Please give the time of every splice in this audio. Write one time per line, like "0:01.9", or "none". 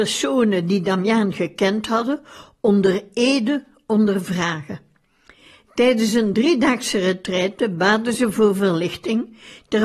none